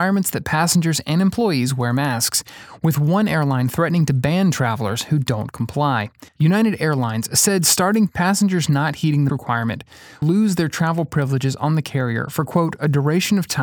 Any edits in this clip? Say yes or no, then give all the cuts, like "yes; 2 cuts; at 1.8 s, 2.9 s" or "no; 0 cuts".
yes; 4 cuts; at 6.3 s, 8.1 s, 9.3 s, 10.2 s